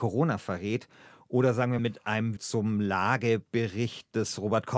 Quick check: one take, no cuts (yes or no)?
no